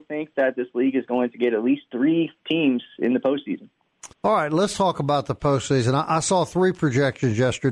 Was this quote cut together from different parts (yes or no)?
yes